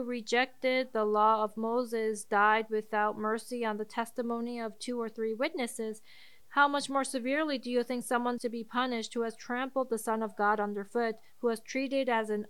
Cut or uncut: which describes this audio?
cut